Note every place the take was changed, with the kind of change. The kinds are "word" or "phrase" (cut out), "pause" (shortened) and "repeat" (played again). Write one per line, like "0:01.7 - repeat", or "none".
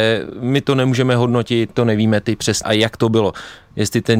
0:01.7 - word
0:02.6 - word